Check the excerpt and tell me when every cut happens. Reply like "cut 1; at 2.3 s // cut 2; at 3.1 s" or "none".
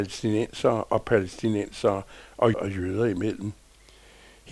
cut 1; at 2.5 s